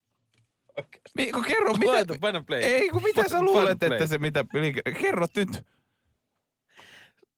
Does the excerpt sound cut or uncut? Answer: cut